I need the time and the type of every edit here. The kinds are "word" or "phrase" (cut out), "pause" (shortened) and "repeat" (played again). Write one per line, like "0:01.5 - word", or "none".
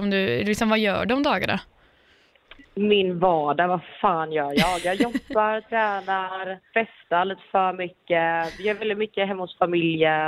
0:06.7 - pause